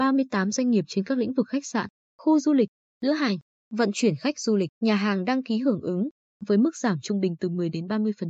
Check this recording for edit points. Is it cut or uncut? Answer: cut